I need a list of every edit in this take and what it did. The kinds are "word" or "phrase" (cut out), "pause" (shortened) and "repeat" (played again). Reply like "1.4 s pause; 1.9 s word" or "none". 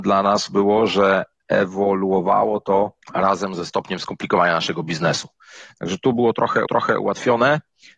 3.0 s pause; 6.7 s repeat